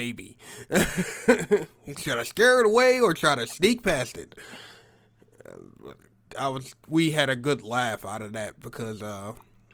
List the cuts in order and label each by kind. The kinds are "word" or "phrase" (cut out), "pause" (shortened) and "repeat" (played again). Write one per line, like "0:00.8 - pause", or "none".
0:01.9 - word
0:06.3 - word
0:06.8 - pause